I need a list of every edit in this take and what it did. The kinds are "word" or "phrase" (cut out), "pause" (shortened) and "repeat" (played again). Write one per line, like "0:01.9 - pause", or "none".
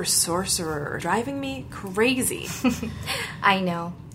0:01.0 - word